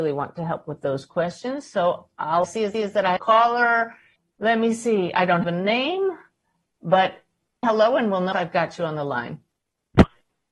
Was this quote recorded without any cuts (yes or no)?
no